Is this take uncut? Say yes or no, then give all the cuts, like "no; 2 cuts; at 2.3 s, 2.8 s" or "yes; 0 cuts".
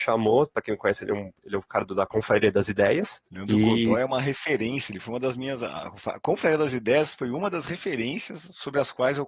no; 1 cut; at 3.3 s